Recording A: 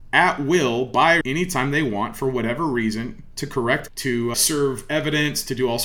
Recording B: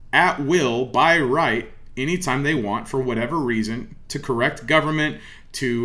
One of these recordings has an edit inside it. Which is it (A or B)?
A